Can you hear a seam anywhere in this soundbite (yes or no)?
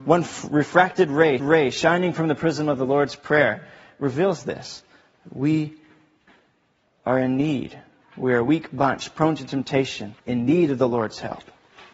yes